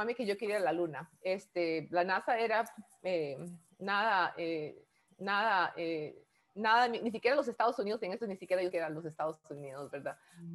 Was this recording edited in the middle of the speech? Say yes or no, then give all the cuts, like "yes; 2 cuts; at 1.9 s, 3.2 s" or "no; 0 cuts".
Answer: yes; 3 cuts; at 5.1 s, 8.2 s, 8.7 s